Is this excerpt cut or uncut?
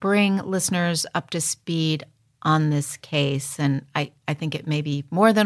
uncut